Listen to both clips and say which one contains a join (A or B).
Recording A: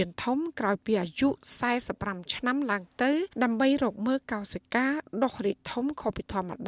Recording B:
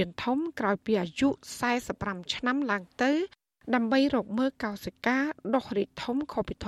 A